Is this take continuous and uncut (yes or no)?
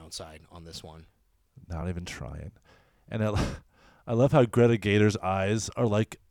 yes